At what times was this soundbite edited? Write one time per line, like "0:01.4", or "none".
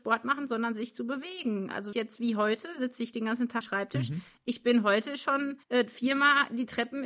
0:01.9
0:03.6
0:05.6

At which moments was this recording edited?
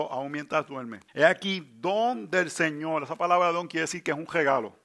0:01.1

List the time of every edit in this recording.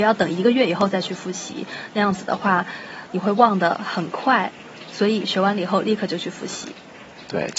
0:03.1

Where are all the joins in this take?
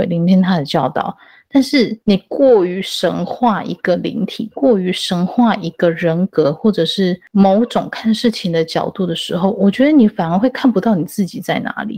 none

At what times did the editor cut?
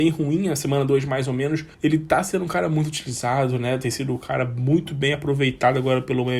0:01.7

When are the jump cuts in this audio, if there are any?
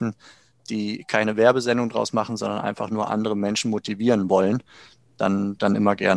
none

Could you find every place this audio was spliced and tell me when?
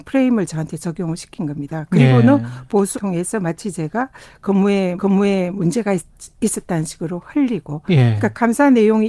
0:02.9
0:05.0

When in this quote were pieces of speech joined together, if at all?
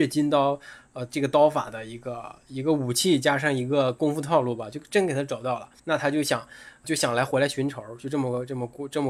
0:05.8
0:06.8

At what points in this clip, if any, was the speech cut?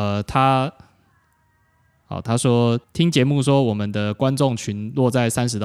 0:02.8

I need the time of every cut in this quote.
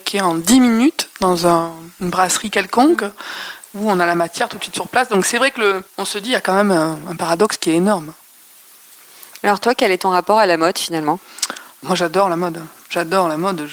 0:01.1
0:05.9

